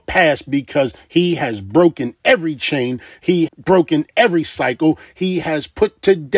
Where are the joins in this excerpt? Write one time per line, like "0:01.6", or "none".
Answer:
0:03.5